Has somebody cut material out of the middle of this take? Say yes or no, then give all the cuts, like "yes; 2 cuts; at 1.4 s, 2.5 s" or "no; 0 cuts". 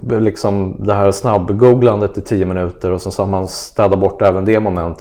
no; 0 cuts